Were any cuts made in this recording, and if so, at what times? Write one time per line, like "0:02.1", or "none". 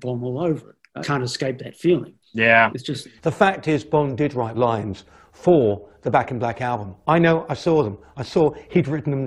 0:01.0
0:02.2
0:03.2
0:04.5